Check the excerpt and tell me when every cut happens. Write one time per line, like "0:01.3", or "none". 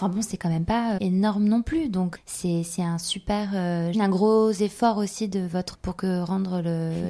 0:01.0
0:02.2
0:03.9
0:05.7